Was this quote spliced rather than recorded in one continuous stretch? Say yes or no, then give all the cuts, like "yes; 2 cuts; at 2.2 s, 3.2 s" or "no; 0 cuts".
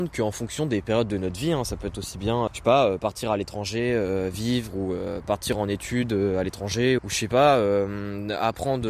yes; 2 cuts; at 2.5 s, 7.0 s